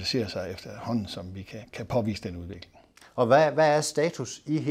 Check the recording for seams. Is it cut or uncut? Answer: uncut